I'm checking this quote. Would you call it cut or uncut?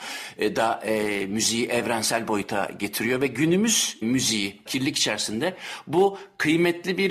cut